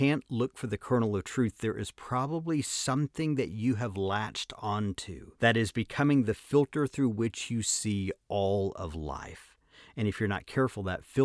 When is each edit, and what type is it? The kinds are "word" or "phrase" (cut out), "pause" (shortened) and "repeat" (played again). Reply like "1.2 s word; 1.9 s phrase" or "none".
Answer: 5.4 s pause